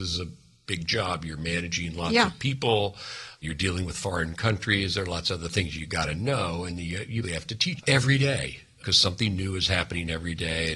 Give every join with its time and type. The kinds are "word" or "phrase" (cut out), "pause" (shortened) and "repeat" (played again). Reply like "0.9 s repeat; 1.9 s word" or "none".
7.2 s word; 7.8 s word